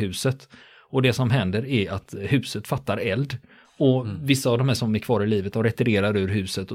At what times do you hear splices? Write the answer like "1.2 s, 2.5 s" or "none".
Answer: 4.8 s